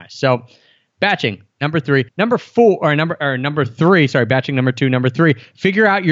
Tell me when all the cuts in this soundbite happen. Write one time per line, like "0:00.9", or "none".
0:02.1